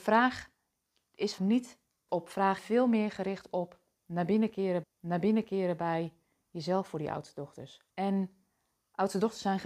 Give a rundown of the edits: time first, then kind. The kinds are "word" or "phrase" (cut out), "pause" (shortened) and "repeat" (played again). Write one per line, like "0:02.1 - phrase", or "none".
0:01.4 - word
0:02.1 - word
0:02.6 - phrase
0:04.8 - repeat
0:07.9 - pause